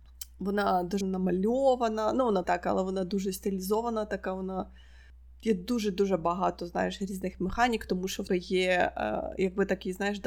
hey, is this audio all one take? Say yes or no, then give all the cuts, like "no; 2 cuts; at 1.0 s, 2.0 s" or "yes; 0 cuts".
no; 3 cuts; at 1.0 s, 2.4 s, 8.3 s